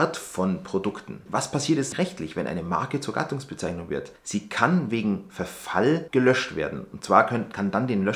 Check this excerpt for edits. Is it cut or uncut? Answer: cut